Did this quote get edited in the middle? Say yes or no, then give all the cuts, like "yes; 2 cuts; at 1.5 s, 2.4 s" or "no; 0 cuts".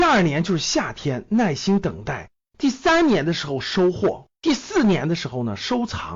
yes; 1 cut; at 4.3 s